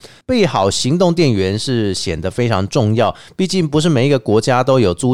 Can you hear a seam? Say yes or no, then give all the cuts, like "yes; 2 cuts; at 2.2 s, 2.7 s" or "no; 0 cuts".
no; 0 cuts